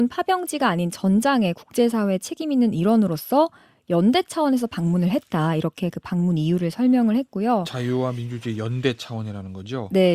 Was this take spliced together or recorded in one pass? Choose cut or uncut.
uncut